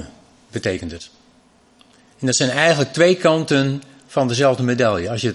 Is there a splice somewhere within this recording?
no; 0 cuts

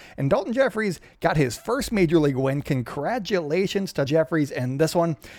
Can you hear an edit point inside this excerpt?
yes; 1 cut; at 4.1 s

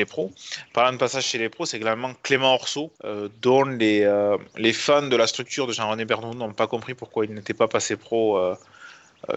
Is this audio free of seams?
no; 1 cut; at 3.0 s

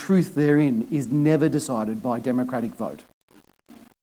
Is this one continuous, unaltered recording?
yes; 0 cuts

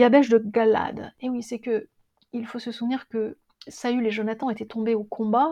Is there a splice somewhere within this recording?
no; 0 cuts

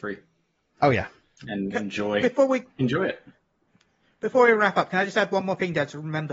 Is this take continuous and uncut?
yes; 0 cuts

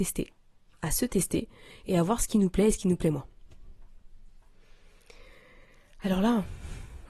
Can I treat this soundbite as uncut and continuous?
yes; 0 cuts

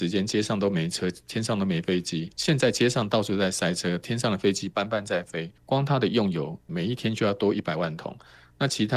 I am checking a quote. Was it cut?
yes; 3 cuts; at 2.3 s, 5.6 s, 6.7 s

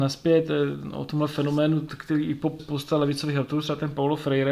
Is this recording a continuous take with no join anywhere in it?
no; 1 cut; at 2.6 s

